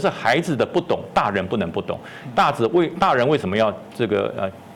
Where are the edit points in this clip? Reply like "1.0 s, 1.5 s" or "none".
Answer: none